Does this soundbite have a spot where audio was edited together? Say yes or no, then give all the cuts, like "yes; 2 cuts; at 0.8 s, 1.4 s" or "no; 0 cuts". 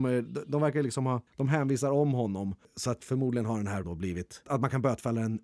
yes; 3 cuts; at 1.3 s, 3.8 s, 4.5 s